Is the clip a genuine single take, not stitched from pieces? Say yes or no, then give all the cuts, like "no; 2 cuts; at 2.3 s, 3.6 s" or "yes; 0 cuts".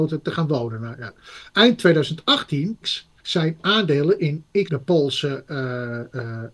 no; 3 cuts; at 2.8 s, 3.2 s, 4.7 s